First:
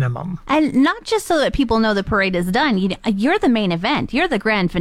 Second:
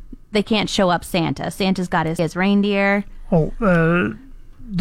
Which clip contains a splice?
second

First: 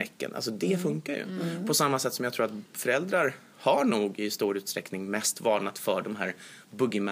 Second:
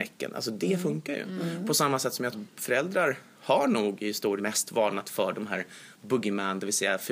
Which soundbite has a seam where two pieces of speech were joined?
second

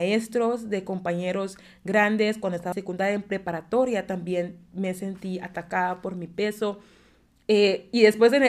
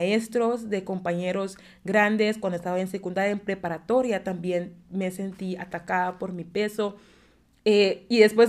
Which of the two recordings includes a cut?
first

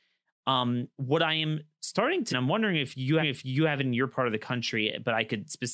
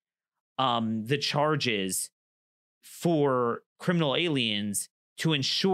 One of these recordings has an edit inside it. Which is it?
first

